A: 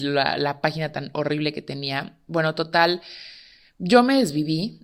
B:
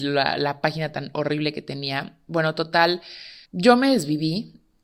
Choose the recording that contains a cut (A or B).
B